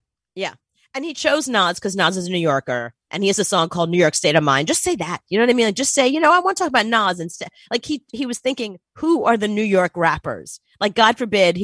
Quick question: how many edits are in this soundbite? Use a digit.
0